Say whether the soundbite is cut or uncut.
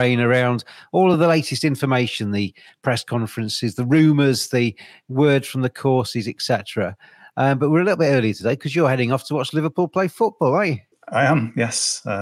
uncut